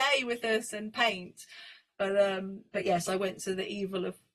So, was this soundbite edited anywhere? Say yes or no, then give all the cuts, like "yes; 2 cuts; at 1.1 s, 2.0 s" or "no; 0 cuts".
no; 0 cuts